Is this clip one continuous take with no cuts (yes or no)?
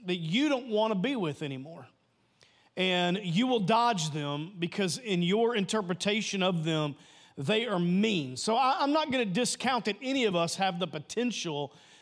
yes